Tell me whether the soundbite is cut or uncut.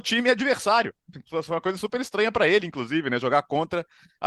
uncut